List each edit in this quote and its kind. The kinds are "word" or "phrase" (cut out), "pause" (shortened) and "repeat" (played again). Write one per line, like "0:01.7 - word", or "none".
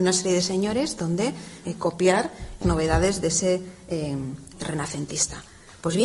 0:01.6 - word
0:02.6 - word
0:04.5 - word